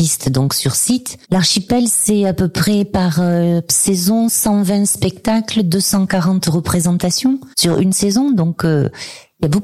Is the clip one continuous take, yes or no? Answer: no